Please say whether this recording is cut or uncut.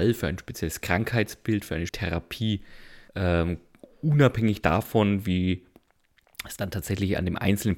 cut